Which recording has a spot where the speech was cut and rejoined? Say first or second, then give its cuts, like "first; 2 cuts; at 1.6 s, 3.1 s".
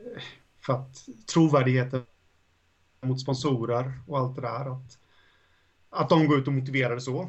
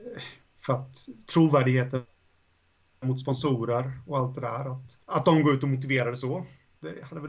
second; 1 cut; at 5.0 s